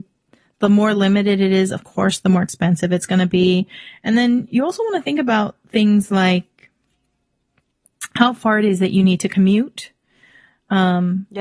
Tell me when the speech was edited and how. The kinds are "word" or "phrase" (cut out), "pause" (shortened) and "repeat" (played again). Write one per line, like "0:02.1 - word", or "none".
none